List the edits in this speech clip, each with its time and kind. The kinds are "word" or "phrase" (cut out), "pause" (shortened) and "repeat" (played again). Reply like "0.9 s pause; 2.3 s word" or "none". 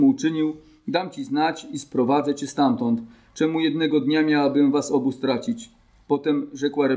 none